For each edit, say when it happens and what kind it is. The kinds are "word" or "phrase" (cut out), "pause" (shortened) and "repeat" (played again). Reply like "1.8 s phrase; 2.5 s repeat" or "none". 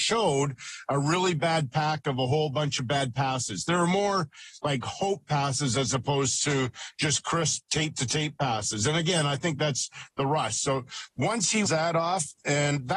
11.7 s word